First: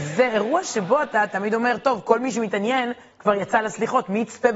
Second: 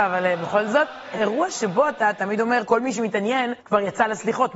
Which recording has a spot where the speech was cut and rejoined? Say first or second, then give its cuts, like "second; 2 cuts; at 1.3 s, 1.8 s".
second; 3 cuts; at 1.1 s, 2.6 s, 3.6 s